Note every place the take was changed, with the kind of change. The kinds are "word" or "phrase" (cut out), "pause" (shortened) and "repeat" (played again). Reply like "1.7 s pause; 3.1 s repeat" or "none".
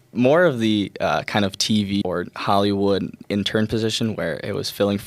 2.0 s word